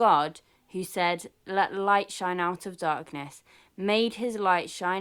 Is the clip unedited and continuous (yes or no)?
yes